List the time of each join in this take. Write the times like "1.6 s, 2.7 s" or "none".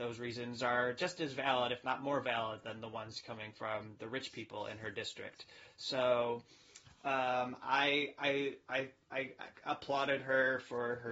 none